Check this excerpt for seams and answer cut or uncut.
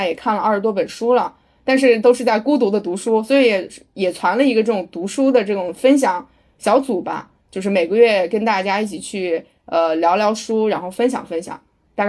uncut